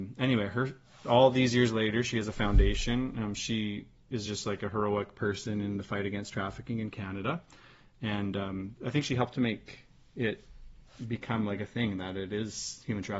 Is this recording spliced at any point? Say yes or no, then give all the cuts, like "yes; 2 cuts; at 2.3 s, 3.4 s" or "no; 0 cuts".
no; 0 cuts